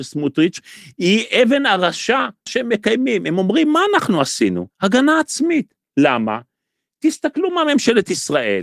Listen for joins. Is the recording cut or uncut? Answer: cut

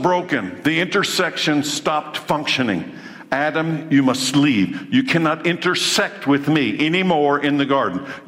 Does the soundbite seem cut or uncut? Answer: uncut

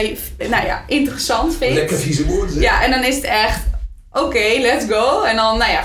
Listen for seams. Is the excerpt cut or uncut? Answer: uncut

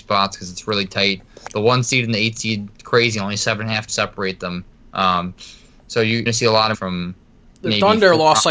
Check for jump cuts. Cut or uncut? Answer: cut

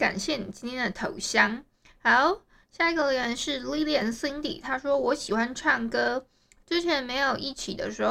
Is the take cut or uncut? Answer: uncut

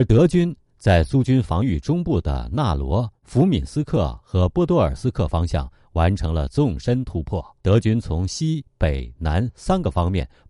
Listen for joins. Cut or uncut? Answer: cut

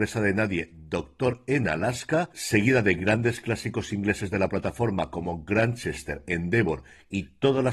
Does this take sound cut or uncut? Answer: uncut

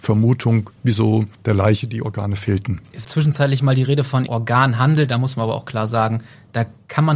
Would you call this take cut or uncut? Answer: cut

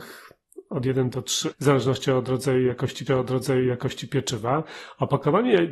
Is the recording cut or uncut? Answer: cut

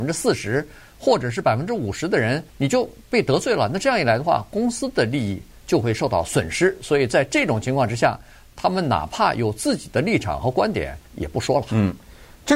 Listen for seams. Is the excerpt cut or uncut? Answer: cut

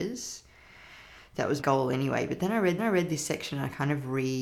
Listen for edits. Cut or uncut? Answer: cut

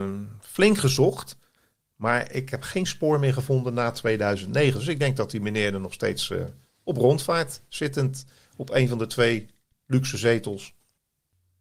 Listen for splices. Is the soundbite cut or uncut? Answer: uncut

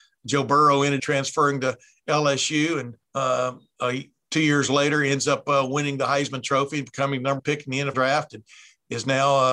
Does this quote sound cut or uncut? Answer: cut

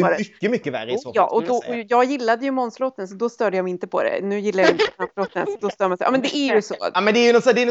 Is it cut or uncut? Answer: uncut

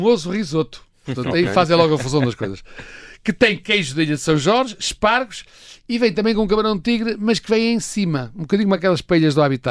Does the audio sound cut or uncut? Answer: uncut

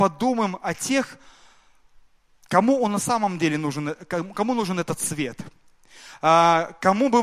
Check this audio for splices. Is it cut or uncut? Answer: uncut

